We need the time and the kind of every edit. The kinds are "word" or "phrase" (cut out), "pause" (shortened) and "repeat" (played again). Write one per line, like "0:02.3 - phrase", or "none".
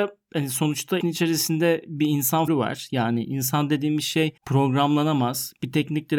0:01.0 - word
0:02.5 - word
0:04.4 - pause